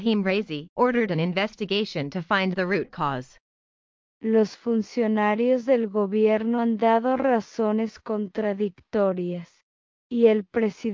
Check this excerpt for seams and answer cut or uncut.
uncut